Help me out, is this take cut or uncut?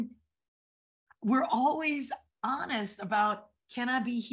uncut